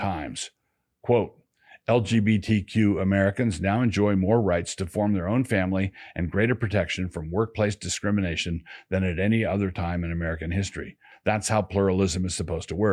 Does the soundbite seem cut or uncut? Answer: uncut